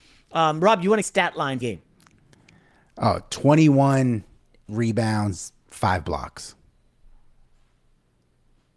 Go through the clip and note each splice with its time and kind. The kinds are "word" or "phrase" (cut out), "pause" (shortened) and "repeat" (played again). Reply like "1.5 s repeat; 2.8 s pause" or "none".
1.0 s phrase; 1.6 s word; 4.7 s word